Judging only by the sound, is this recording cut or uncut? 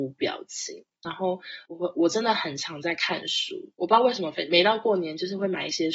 cut